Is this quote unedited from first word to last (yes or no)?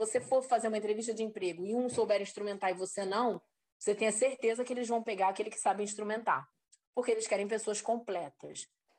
yes